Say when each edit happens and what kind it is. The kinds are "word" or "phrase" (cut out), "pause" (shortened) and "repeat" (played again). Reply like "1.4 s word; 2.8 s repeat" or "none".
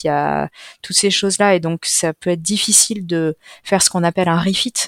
none